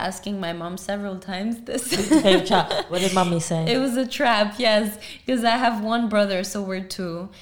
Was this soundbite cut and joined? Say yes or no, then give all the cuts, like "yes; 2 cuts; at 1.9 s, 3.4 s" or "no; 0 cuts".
no; 0 cuts